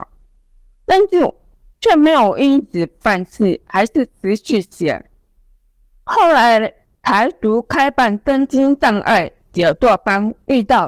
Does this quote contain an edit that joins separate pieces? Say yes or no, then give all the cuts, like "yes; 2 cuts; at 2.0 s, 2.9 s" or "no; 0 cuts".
no; 0 cuts